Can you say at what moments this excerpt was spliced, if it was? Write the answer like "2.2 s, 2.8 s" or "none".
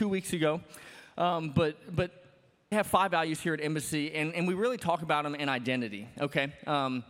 2.7 s